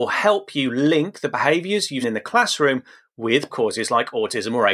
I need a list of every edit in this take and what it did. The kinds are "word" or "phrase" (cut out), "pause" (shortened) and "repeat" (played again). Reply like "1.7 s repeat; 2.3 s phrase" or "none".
2.0 s word; 3.5 s word

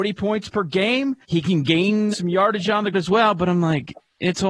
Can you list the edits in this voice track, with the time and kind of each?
1.2 s pause; 2.1 s word; 2.9 s word

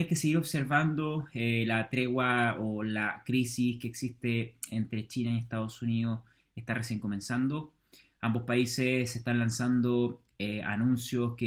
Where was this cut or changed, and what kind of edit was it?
none

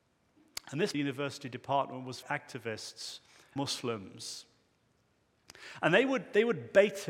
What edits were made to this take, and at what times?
0.9 s word; 2.2 s phrase; 3.6 s word

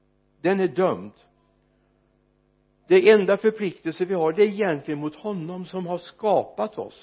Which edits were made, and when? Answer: none

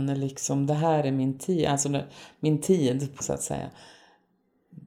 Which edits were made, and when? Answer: 3.2 s word

